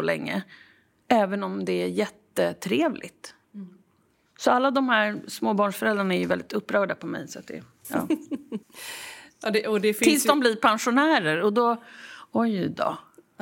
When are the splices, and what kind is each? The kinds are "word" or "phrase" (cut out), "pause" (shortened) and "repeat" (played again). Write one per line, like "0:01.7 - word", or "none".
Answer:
0:03.4 - pause
0:08.6 - pause